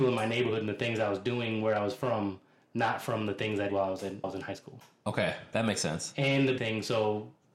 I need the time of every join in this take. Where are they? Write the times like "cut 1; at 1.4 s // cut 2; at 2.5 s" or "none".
cut 1; at 3.7 s // cut 2; at 4.2 s // cut 3; at 5.5 s // cut 4; at 6.6 s

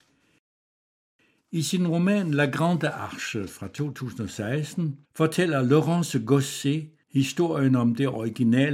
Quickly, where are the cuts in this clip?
cut 1; at 5.0 s // cut 2; at 7.0 s

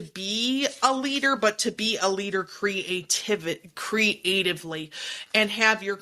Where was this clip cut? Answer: none

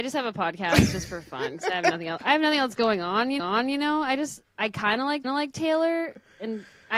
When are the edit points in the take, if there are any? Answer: cut 1; at 3.4 s // cut 2; at 4.5 s // cut 3; at 5.2 s

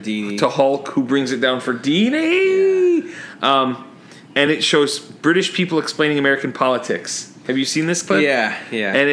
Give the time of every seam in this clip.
none

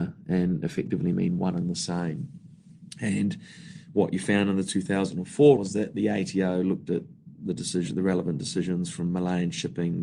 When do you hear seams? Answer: cut 1; at 5.6 s

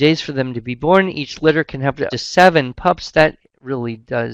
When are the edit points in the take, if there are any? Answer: cut 1; at 2.1 s

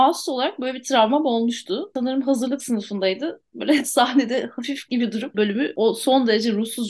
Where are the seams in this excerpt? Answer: cut 1; at 4.9 s // cut 2; at 5.3 s

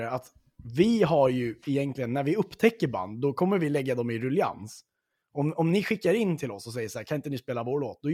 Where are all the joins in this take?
none

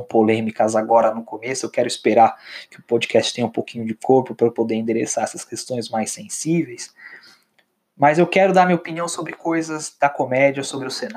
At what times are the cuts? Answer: none

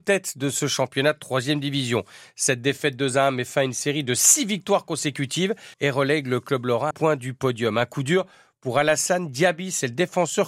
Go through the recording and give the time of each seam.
cut 1; at 5.7 s // cut 2; at 6.9 s

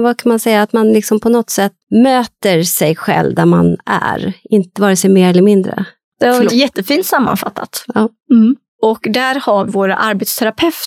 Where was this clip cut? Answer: cut 1; at 1.8 s // cut 2; at 6.5 s // cut 3; at 9.7 s

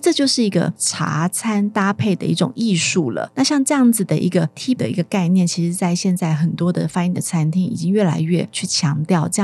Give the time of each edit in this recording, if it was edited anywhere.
cut 1; at 4.8 s // cut 2; at 7.1 s

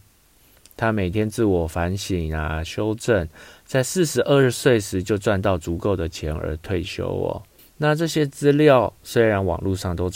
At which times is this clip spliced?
cut 1; at 7.6 s

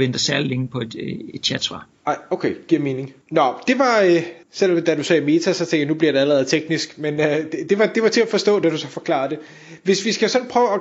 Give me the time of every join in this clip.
cut 1; at 3.2 s // cut 2; at 4.4 s

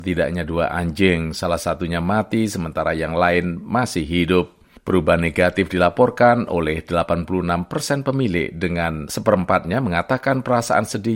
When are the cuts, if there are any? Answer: none

